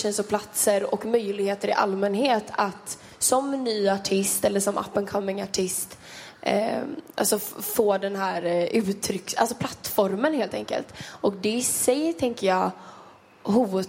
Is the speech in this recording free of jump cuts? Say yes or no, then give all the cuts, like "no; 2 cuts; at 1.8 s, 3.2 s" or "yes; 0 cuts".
yes; 0 cuts